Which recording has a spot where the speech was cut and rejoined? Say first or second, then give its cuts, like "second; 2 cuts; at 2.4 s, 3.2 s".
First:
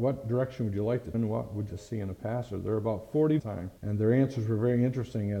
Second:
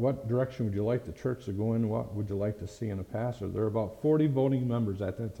first; 4 cuts; at 1.1 s, 1.7 s, 3.4 s, 3.8 s